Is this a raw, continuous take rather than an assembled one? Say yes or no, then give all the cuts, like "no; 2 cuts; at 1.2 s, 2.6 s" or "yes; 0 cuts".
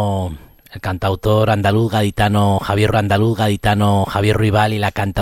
no; 1 cut; at 2.9 s